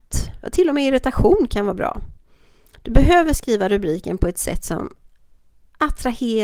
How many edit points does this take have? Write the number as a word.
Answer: zero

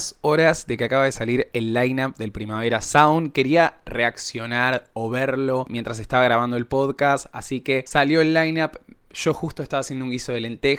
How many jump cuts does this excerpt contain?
zero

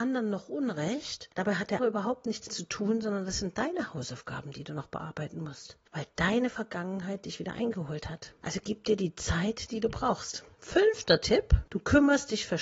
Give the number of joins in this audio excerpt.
four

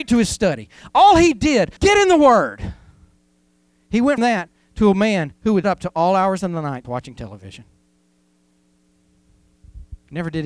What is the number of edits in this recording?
four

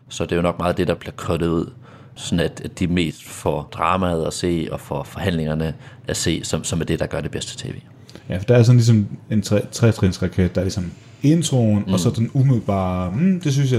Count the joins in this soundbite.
one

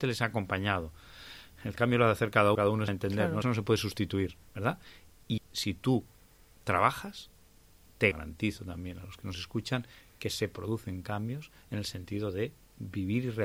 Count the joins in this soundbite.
six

